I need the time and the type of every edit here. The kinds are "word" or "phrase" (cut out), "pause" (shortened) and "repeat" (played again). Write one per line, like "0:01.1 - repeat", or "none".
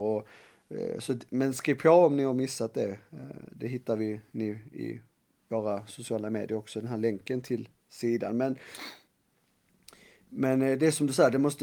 none

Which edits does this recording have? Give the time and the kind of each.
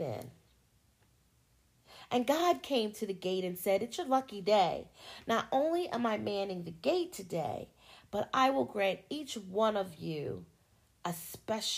none

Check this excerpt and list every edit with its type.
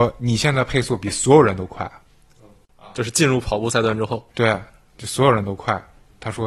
none

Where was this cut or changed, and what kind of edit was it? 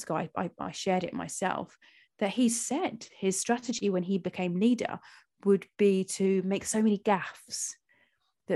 none

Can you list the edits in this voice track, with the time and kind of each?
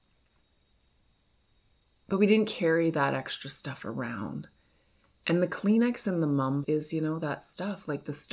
0:06.6 - word

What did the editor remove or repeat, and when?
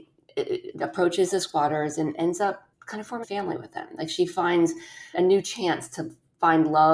0:02.8 - word
0:03.2 - word
0:05.1 - word

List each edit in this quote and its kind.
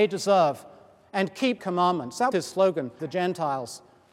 0:01.6 - word
0:02.3 - word
0:03.0 - phrase

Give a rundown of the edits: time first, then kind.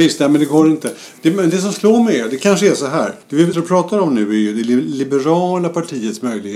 0:03.2 - pause
0:03.5 - word

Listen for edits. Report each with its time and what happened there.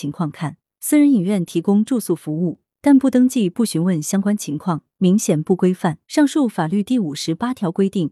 0:06.0 - pause

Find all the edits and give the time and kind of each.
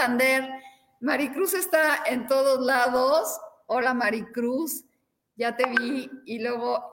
none

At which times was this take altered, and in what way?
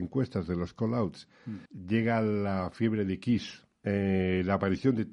0:01.7 - pause
0:03.7 - pause

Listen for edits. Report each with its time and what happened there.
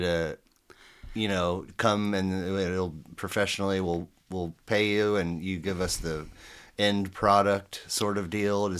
none

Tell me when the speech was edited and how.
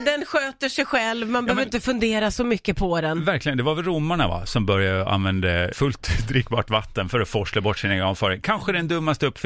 0:05.7 - word

